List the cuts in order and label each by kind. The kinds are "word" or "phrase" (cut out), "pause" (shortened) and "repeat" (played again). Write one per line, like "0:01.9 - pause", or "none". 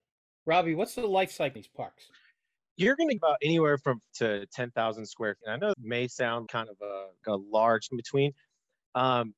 0:01.6 - word
0:03.2 - word
0:04.1 - word
0:05.4 - word
0:05.7 - word
0:06.5 - word
0:07.2 - word
0:07.9 - word

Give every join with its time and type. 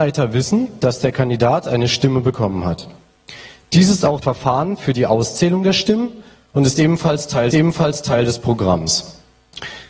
0:04.2 - word
0:07.5 - repeat

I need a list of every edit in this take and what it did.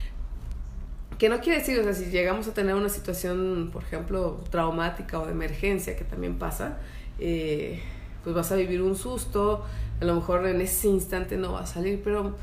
none

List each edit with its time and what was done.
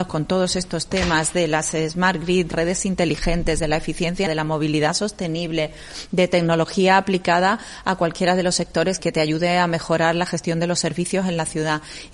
0:02.5 - word
0:04.3 - word
0:09.0 - word

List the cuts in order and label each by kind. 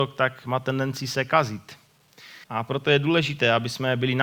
0:02.4 - pause

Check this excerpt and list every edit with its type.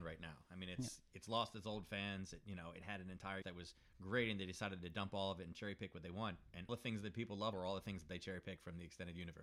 0:03.4 - word
0:06.7 - word
0:07.5 - word

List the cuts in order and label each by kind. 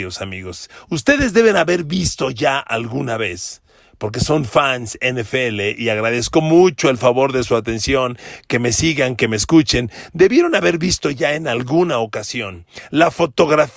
none

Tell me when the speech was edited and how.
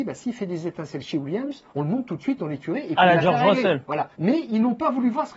0:01.7 - pause
0:04.1 - pause

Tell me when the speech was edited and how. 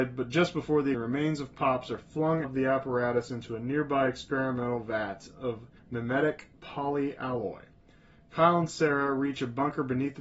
0:00.9 - word
0:02.4 - word
0:05.8 - pause

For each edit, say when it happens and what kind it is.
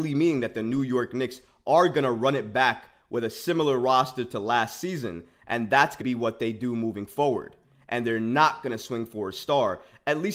0:06.0 - word

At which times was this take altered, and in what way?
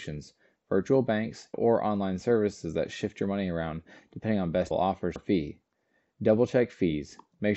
0:01.5 - word
0:04.7 - word
0:05.2 - word

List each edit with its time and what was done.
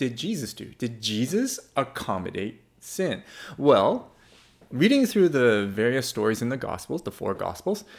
none

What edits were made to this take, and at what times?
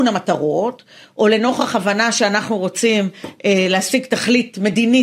none

